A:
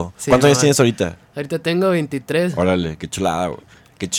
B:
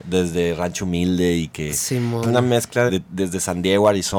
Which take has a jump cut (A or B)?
B